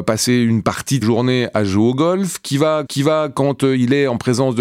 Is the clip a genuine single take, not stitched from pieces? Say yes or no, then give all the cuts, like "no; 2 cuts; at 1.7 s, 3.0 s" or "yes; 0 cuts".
no; 2 cuts; at 1.0 s, 2.9 s